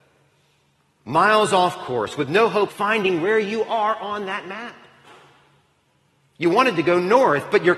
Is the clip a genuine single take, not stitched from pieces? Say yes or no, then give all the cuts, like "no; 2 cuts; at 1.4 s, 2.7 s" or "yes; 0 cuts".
no; 1 cut; at 2.7 s